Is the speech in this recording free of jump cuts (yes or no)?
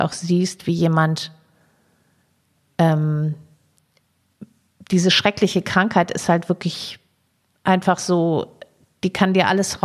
yes